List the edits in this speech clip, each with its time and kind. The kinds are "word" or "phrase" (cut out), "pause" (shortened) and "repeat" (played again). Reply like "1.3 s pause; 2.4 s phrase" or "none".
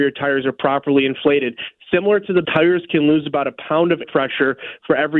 2.4 s word; 4.0 s word